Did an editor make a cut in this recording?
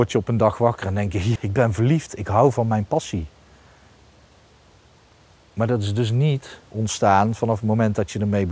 yes; 1 cut; at 1.4 s

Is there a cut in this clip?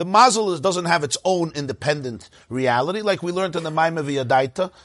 no; 0 cuts

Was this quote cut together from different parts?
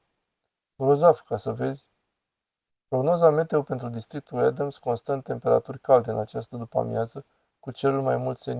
no; 0 cuts

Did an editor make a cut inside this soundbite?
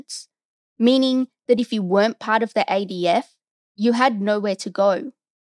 no; 0 cuts

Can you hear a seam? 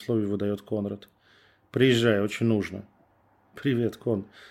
no; 0 cuts

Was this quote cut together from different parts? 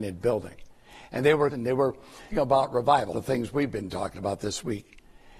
yes; 3 cuts; at 1.5 s, 2.3 s, 3.1 s

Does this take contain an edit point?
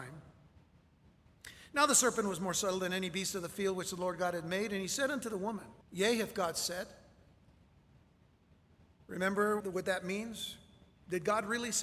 yes; 2 cuts; at 5.8 s, 9.6 s

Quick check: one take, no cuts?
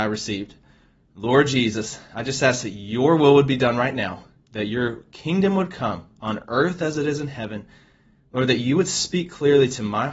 yes; 0 cuts

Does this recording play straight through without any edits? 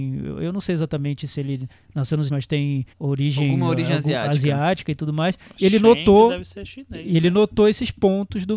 no; 2 cuts; at 2.3 s, 2.9 s

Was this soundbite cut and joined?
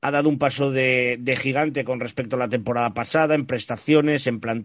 no; 0 cuts

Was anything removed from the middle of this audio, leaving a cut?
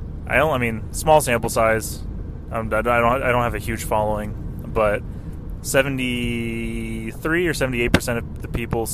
no; 0 cuts

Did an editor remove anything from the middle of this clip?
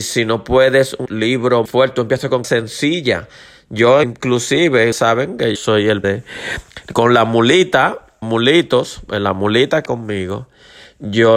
yes; 9 cuts; at 1.1 s, 1.6 s, 2.4 s, 4.0 s, 4.9 s, 5.5 s, 6.0 s, 8.2 s, 9.9 s

